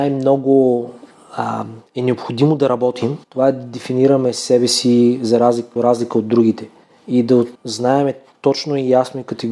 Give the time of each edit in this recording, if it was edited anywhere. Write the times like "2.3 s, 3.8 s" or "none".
1.9 s, 3.2 s, 5.8 s, 6.8 s, 7.5 s